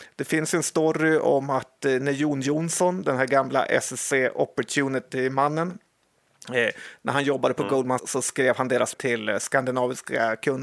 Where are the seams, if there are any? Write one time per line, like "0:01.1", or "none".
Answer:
0:08.0
0:08.9